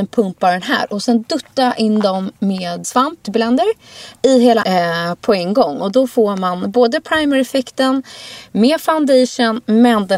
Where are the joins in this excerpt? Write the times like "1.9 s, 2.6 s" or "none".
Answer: 2.8 s, 3.2 s, 4.6 s